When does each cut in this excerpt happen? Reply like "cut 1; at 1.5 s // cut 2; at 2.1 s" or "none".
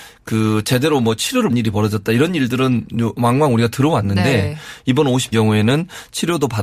cut 1; at 1.5 s // cut 2; at 5.3 s